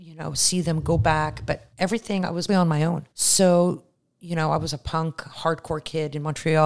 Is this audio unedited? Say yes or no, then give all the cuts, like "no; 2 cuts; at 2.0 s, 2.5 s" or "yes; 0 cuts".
no; 3 cuts; at 1.7 s, 2.5 s, 3.1 s